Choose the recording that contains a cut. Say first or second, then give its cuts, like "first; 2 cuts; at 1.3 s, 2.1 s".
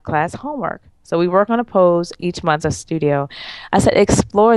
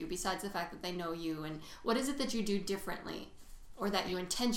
first; 1 cut; at 2.6 s